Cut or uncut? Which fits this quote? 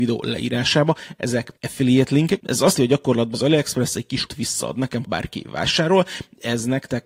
cut